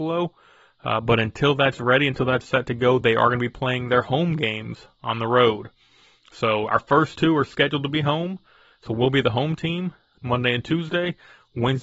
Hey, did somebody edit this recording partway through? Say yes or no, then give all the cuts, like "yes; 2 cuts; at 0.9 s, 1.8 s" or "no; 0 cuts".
no; 0 cuts